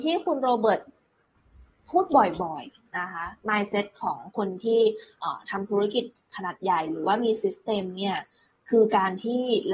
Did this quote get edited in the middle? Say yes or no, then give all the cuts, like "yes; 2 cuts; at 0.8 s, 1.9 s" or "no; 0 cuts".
no; 0 cuts